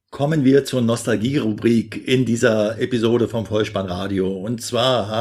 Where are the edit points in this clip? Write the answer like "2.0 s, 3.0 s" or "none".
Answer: none